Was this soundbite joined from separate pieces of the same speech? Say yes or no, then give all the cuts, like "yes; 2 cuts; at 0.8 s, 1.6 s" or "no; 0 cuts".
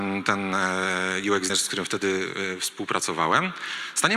yes; 1 cut; at 1.5 s